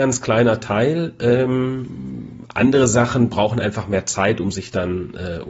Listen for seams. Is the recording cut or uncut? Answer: uncut